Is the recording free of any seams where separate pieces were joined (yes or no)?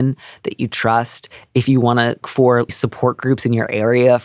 no